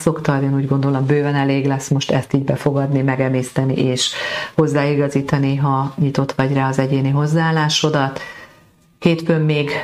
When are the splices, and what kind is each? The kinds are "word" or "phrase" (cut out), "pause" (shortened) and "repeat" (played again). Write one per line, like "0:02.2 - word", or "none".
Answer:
none